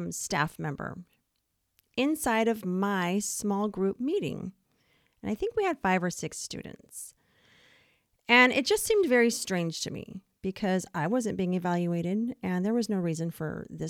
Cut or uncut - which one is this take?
uncut